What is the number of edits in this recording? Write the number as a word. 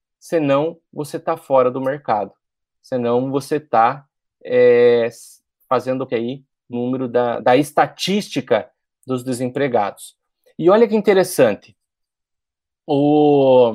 three